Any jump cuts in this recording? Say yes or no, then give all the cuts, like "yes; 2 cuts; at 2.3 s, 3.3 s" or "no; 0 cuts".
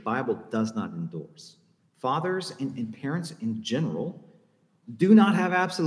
yes; 1 cut; at 1.8 s